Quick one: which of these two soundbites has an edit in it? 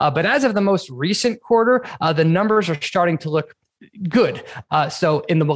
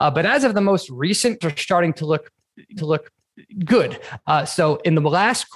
second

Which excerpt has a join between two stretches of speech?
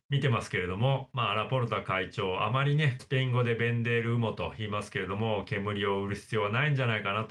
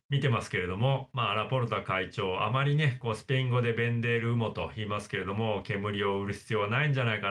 first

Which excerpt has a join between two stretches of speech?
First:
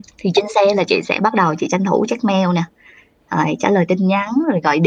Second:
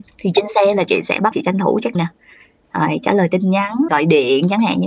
second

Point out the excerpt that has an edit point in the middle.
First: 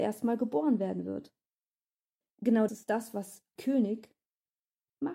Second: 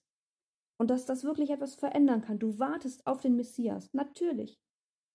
first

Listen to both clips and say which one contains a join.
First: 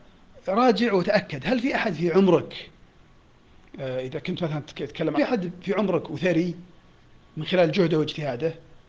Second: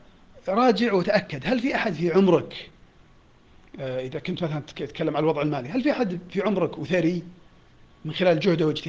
first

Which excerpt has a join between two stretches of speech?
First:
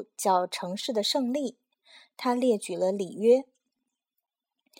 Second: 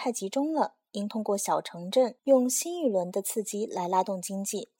second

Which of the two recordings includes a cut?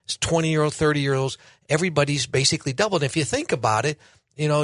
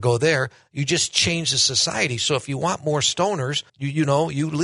second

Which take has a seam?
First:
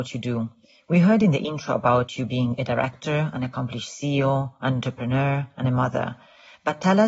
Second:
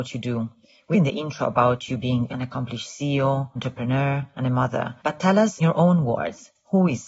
second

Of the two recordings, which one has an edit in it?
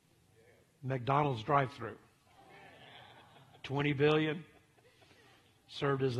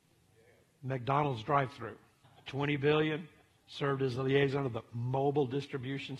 second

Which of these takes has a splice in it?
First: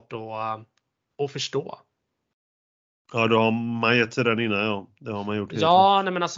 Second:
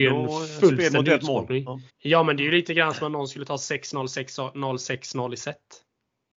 second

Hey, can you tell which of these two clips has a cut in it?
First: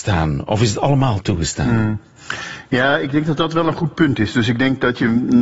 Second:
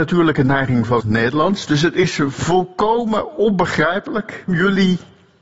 second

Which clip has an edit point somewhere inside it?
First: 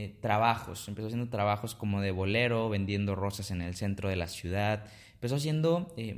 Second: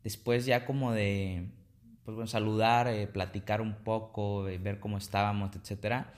second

